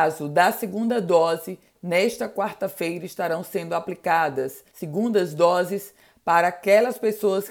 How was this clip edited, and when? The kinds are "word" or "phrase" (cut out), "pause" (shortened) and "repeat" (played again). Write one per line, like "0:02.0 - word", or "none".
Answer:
0:04.7 - pause